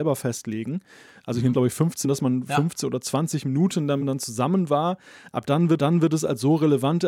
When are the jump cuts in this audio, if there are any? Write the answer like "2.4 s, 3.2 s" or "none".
1.5 s, 2.0 s, 4.0 s, 5.8 s